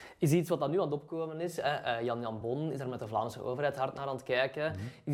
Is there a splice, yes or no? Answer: no